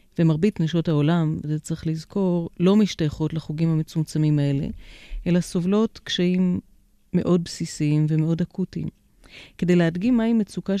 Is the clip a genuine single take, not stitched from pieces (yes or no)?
yes